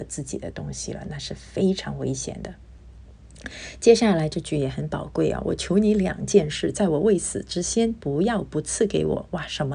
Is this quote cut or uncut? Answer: uncut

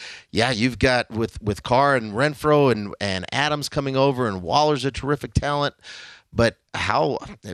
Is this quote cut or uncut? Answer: uncut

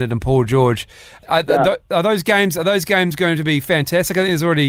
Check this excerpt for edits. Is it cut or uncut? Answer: uncut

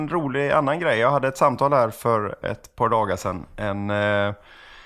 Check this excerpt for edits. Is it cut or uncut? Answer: uncut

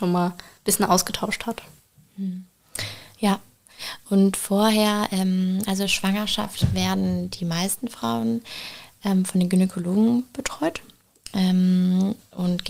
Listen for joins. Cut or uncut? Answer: uncut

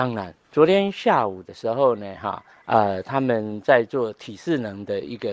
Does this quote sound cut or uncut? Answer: uncut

